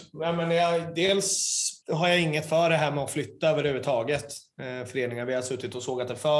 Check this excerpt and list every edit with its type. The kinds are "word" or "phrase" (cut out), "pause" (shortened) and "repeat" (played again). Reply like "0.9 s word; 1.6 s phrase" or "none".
1.8 s pause